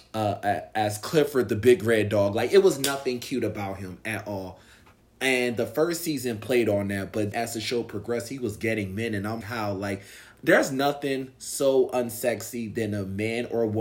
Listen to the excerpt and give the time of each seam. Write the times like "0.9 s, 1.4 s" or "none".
7.3 s, 9.4 s